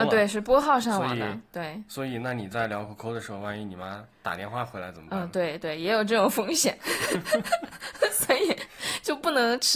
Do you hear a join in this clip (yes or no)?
no